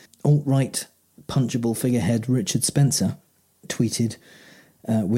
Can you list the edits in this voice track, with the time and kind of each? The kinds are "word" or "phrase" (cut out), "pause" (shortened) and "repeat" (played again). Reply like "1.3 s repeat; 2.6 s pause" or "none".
none